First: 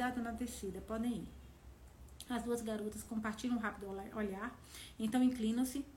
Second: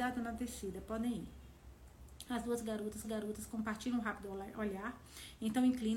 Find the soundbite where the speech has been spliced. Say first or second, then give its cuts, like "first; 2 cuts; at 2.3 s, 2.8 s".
second; 1 cut; at 3.0 s